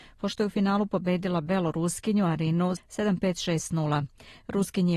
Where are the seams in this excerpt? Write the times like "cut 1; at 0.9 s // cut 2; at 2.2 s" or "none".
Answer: cut 1; at 2.8 s